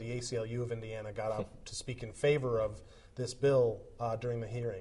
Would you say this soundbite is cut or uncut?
uncut